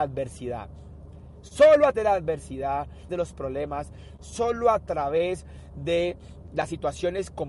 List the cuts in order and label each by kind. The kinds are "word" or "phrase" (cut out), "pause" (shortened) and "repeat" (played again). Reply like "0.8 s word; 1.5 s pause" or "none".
1.9 s word; 3.1 s phrase